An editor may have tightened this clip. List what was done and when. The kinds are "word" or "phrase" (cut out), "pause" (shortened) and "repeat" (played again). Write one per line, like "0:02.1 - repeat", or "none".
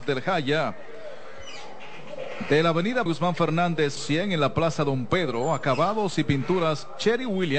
0:03.1 - phrase
0:04.0 - word